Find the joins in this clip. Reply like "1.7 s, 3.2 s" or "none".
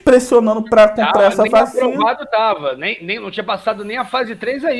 none